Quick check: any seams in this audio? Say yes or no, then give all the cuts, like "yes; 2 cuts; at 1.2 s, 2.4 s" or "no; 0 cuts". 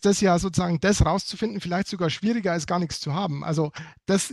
no; 0 cuts